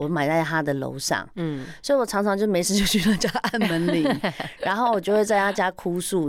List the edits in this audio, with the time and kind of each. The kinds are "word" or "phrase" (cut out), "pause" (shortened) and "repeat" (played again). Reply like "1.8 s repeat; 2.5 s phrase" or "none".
none